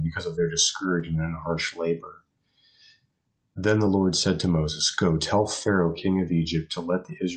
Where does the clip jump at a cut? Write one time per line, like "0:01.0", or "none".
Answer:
none